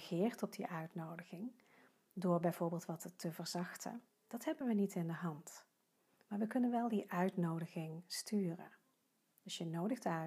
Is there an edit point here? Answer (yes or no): no